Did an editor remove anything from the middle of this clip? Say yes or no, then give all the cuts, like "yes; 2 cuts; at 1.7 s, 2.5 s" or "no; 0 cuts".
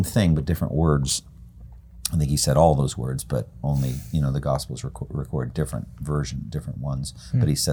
no; 0 cuts